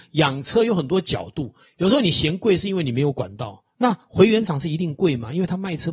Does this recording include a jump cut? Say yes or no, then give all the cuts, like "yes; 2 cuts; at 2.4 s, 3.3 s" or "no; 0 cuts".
yes; 1 cut; at 3.7 s